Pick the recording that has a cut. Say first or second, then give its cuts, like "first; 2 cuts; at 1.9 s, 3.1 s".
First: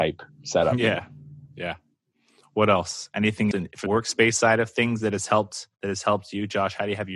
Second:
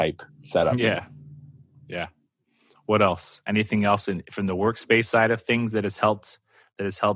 first; 4 cuts; at 1.5 s, 3.5 s, 3.9 s, 5.7 s